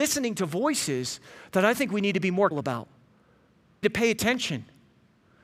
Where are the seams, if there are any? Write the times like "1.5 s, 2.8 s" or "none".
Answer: 2.5 s, 3.8 s